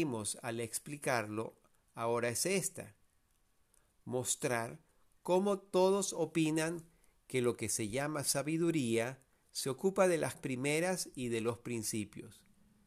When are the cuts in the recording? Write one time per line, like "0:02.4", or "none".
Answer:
0:10.3